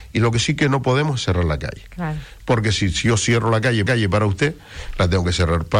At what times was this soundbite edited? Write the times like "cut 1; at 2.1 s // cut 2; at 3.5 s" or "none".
cut 1; at 3.9 s